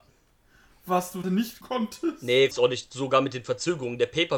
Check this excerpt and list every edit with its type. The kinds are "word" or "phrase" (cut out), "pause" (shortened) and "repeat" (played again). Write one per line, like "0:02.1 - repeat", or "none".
0:01.2 - word
0:01.6 - word
0:02.5 - word